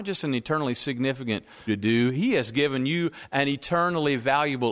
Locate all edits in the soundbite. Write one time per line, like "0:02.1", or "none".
0:01.7